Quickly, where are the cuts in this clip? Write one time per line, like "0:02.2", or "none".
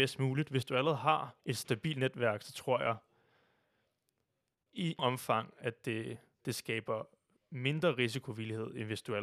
0:01.4
0:05.0